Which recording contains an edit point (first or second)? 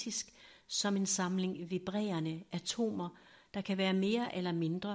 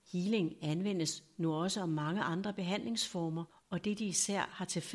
second